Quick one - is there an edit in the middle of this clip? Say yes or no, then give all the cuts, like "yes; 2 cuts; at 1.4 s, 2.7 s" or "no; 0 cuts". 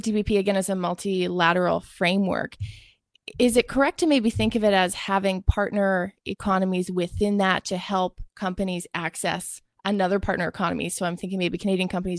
no; 0 cuts